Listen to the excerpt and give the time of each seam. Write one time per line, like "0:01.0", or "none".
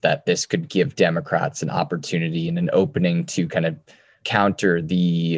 none